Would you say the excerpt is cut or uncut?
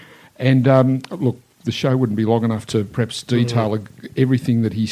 uncut